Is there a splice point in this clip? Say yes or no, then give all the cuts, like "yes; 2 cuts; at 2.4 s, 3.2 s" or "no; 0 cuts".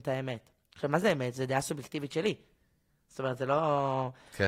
no; 0 cuts